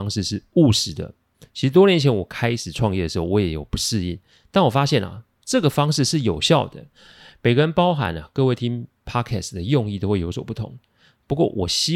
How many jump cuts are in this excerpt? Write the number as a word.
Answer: zero